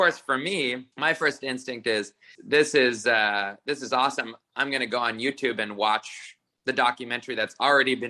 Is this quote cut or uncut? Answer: cut